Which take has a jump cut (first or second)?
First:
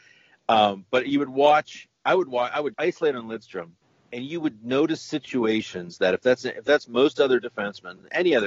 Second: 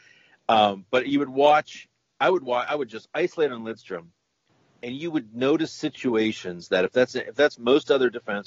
first